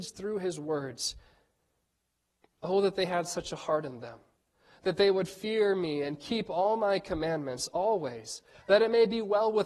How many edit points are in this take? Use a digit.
0